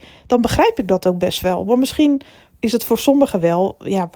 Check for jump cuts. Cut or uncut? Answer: uncut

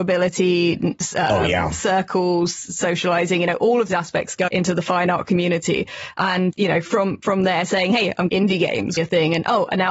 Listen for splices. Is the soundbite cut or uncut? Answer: cut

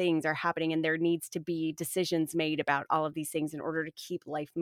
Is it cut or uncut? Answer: uncut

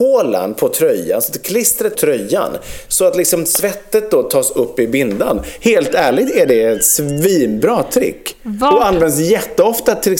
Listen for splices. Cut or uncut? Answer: cut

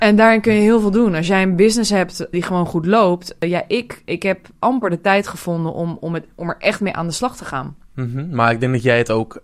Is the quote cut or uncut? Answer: uncut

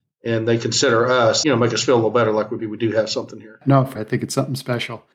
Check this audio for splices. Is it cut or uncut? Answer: cut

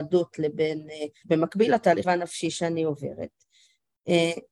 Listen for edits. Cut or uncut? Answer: cut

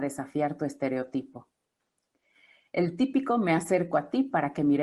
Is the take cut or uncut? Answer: uncut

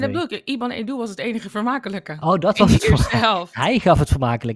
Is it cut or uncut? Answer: uncut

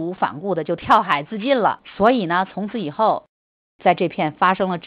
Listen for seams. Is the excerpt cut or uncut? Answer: uncut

